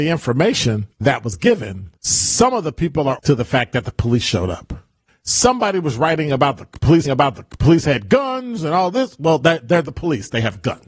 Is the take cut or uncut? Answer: cut